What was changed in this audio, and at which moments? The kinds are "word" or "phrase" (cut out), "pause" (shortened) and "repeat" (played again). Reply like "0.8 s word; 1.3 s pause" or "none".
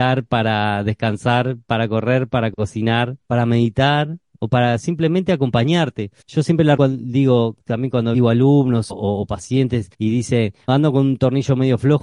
3.2 s pause; 6.2 s pause; 6.8 s word; 8.1 s phrase; 8.9 s word; 9.9 s pause; 10.7 s word